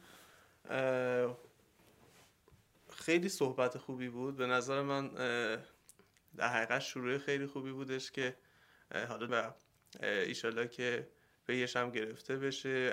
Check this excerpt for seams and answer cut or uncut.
cut